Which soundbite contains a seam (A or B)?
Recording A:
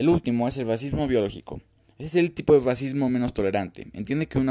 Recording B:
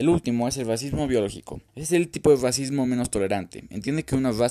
B